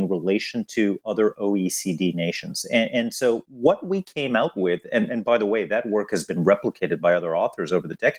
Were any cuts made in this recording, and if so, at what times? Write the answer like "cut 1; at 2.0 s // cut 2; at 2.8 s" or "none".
none